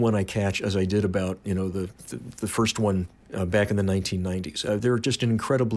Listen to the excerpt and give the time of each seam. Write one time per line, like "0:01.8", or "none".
0:04.8